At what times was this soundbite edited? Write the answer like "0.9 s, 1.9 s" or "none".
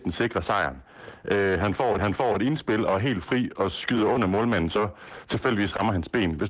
2.0 s, 3.6 s, 4.7 s